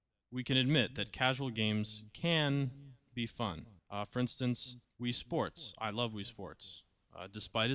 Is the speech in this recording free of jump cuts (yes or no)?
no